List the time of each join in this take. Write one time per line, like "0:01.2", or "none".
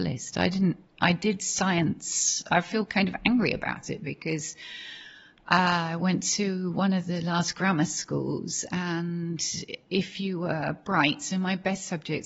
none